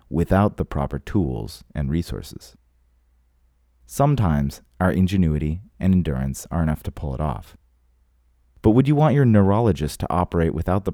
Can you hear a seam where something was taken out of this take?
no; 0 cuts

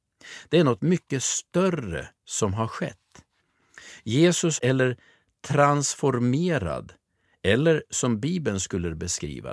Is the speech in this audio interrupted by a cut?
yes; 2 cuts; at 2.2 s, 4.6 s

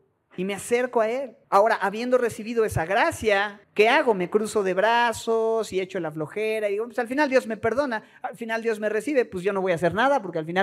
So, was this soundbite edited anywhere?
yes; 2 cuts; at 1.4 s, 3.6 s

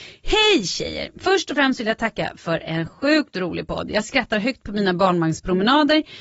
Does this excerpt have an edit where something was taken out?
no; 0 cuts

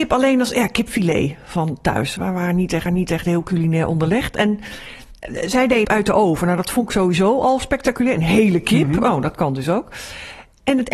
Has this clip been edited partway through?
yes; 2 cuts; at 2.9 s, 5.8 s

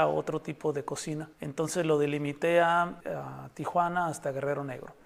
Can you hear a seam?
yes; 2 cuts; at 1.3 s, 3.0 s

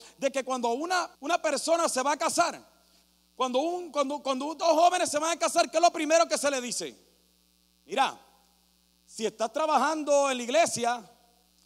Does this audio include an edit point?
yes; 1 cut; at 1.2 s

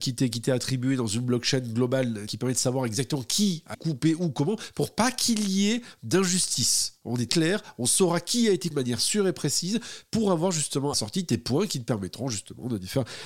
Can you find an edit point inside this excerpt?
yes; 5 cuts; at 2.3 s, 3.7 s, 7.3 s, 8.7 s, 10.9 s

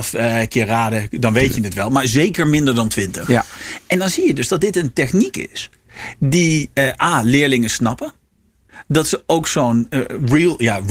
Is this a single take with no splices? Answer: yes; 0 cuts

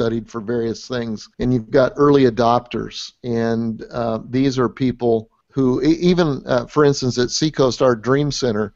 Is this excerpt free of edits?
no; 2 cuts; at 1.3 s, 5.4 s

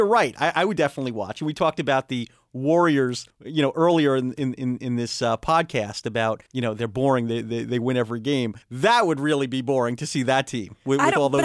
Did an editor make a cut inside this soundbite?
yes; 3 cuts; at 3.3 s, 6.5 s, 8.6 s

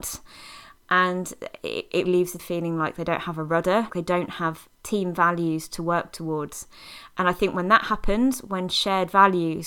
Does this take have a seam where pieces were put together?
yes; 3 cuts; at 2.1 s, 2.4 s, 3.9 s

